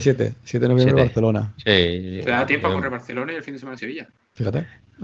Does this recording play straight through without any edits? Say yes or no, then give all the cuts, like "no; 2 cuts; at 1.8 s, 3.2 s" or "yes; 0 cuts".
no; 1 cut; at 3.8 s